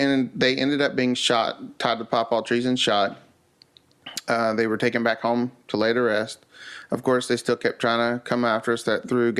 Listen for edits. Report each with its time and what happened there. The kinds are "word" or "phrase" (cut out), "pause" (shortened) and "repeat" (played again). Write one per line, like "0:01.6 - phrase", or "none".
none